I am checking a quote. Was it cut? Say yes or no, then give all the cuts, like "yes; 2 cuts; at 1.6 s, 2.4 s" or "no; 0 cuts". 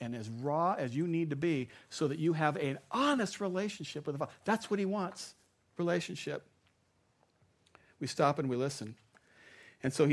no; 0 cuts